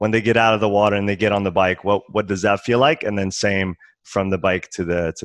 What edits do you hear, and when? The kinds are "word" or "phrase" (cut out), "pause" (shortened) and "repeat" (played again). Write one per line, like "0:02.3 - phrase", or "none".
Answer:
none